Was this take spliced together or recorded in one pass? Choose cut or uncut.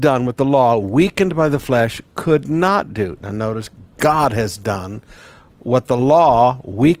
uncut